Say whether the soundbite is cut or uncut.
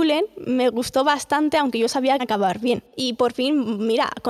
cut